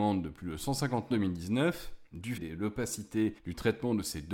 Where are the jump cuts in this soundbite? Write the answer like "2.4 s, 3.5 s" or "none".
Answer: 1.1 s, 2.4 s, 3.4 s